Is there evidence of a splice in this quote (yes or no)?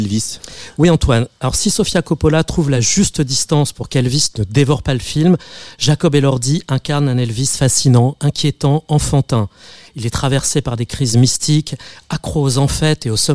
no